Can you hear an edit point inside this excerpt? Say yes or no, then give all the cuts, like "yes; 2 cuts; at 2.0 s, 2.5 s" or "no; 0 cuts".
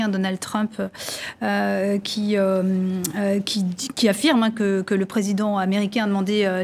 no; 0 cuts